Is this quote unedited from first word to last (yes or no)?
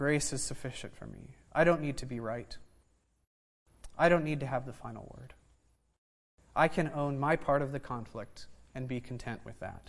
yes